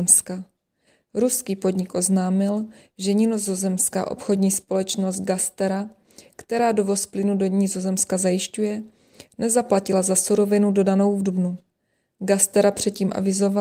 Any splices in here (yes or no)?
no